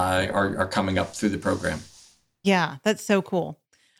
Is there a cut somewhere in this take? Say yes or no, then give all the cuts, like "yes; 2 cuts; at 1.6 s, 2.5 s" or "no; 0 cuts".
no; 0 cuts